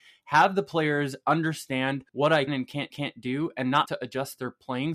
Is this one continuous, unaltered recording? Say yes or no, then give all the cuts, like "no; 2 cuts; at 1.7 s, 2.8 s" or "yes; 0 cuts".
no; 4 cuts; at 2.1 s, 2.5 s, 2.9 s, 3.9 s